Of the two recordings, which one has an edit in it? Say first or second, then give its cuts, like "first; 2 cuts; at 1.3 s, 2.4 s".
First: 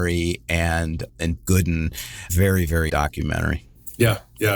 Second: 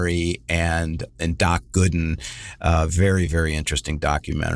first; 3 cuts; at 1.4 s, 2.3 s, 2.9 s